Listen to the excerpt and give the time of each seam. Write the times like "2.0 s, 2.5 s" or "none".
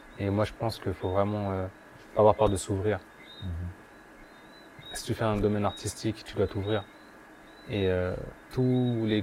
none